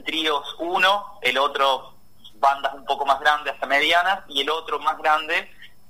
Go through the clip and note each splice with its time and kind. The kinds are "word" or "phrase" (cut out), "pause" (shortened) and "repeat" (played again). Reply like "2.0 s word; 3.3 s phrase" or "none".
none